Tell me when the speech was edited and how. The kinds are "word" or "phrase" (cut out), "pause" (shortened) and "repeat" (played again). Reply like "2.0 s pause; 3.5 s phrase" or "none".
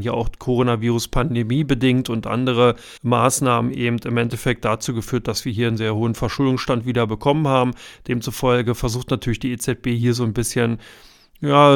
3.0 s pause

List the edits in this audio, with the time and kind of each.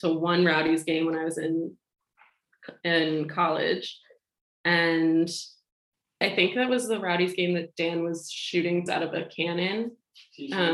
6.2 s word; 8.9 s word

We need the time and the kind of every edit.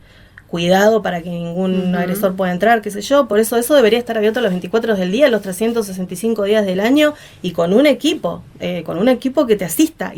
none

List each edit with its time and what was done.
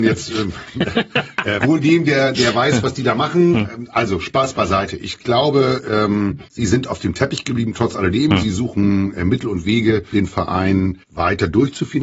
1.6 s word; 2.3 s word; 5.2 s word; 6.5 s pause; 10.1 s word; 11.0 s pause

